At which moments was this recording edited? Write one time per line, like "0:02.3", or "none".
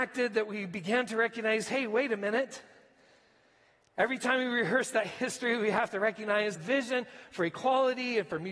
0:06.5